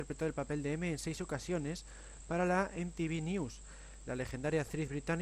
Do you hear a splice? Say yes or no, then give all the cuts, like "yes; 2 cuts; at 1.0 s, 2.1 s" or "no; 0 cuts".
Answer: no; 0 cuts